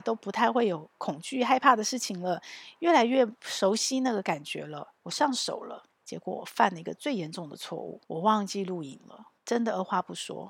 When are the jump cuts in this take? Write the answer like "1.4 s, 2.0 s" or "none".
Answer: 5.0 s, 5.9 s, 8.0 s, 9.4 s